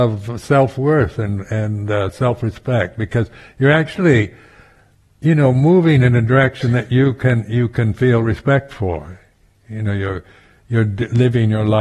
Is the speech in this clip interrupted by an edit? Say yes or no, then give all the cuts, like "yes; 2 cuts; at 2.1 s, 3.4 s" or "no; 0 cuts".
no; 0 cuts